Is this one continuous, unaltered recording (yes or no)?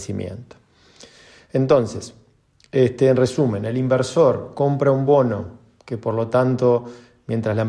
yes